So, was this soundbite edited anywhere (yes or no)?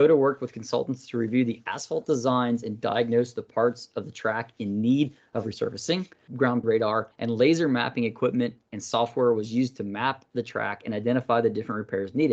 yes